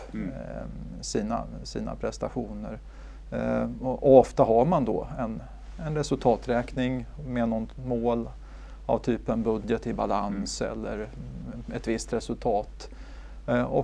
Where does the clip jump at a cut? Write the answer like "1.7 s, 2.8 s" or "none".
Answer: none